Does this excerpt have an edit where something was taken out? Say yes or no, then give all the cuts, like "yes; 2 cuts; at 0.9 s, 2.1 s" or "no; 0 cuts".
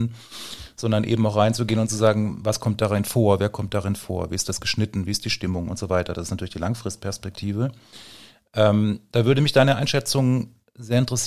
no; 0 cuts